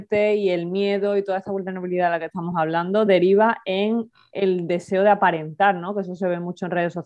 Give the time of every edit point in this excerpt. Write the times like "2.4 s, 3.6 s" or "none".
none